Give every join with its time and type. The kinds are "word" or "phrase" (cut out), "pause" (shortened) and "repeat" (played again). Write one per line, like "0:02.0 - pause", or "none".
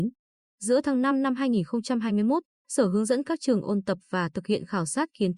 none